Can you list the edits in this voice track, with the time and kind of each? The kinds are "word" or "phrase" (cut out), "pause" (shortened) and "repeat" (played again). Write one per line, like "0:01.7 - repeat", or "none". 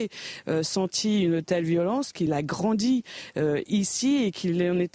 none